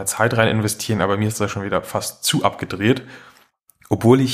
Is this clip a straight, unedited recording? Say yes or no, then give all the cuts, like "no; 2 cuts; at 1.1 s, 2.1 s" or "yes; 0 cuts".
yes; 0 cuts